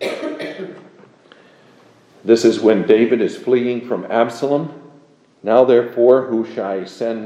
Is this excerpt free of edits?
yes; 0 cuts

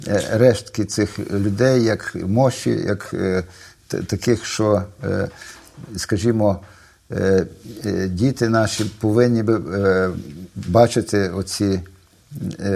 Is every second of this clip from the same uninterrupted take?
yes; 0 cuts

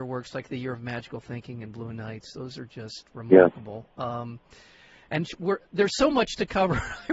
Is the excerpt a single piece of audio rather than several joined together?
yes; 0 cuts

